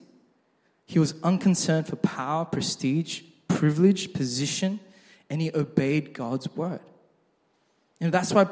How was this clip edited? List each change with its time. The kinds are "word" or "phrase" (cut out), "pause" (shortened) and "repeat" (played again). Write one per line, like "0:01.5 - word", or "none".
none